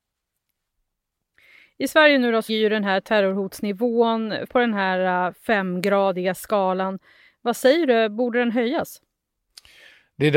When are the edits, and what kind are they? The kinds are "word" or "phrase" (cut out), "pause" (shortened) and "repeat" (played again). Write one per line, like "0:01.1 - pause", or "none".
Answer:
0:02.5 - word
0:04.5 - phrase

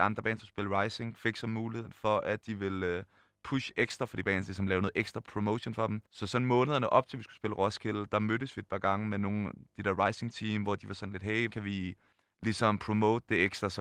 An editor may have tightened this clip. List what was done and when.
0:06.1 - pause
0:11.5 - word
0:12.1 - pause

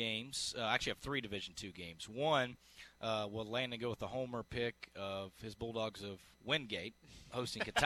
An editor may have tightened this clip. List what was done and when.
none

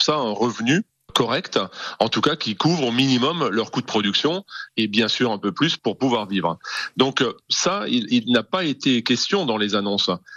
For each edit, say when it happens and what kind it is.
none

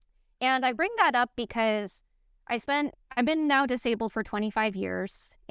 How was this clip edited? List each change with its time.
none

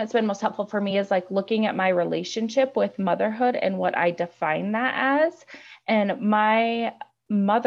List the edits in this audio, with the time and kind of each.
none

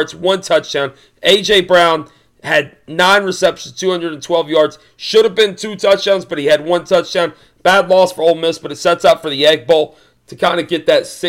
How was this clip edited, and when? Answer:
none

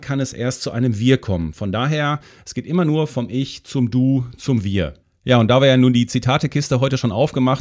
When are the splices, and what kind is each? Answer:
0:05.0 - pause

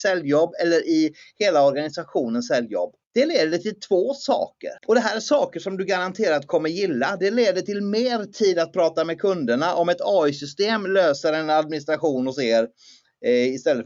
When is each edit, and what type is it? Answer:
0:03.0 - pause
0:04.8 - pause

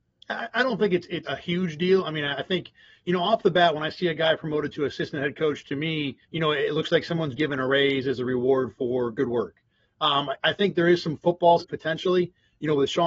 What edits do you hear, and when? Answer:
0:01.2 - word
0:06.2 - pause
0:07.4 - word
0:11.6 - phrase

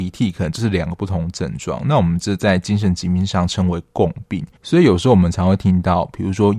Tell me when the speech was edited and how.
0:04.6 - pause

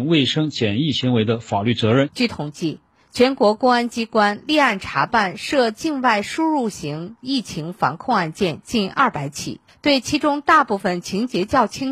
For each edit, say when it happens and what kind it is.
none

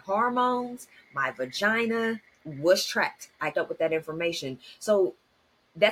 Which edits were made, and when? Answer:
0:02.3 - pause
0:03.5 - word

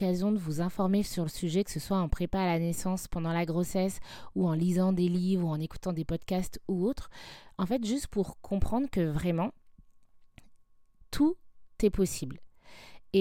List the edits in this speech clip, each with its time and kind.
none

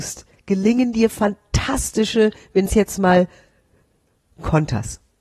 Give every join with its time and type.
0:02.7 - word

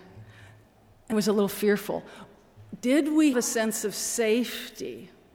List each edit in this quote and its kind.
0:01.1 - word
0:03.3 - word

